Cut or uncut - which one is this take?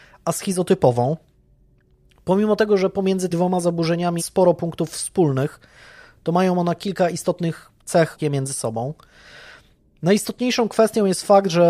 cut